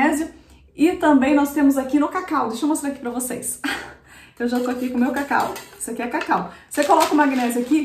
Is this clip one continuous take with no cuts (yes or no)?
yes